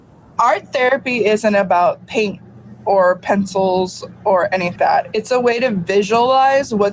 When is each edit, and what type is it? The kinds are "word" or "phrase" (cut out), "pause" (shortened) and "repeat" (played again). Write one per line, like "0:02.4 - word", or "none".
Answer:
0:04.8 - word